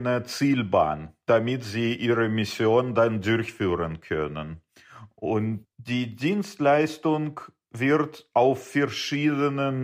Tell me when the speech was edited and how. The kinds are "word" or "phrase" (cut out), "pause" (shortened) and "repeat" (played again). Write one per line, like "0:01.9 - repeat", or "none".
none